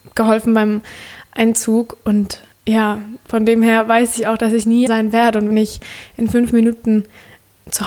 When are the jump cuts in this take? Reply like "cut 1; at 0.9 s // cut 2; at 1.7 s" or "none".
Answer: cut 1; at 2.5 s // cut 2; at 4.9 s // cut 3; at 5.5 s